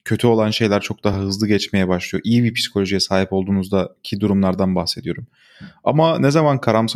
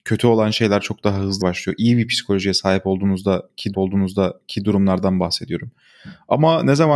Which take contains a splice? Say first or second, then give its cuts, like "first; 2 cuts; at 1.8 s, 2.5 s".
second; 2 cuts; at 1.4 s, 3.7 s